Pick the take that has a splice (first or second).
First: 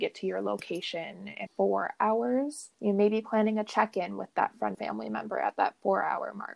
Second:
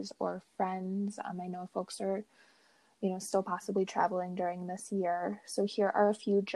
first